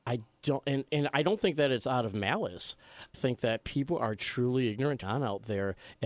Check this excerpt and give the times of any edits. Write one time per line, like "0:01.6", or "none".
0:03.1
0:05.0